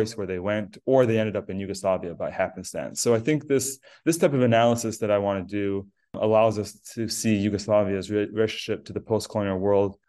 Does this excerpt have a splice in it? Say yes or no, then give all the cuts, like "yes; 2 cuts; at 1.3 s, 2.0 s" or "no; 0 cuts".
no; 0 cuts